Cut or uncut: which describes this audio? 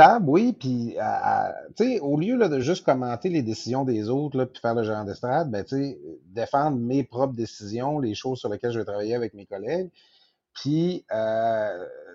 uncut